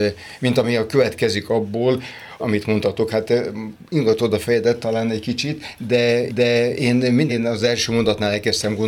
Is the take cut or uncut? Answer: cut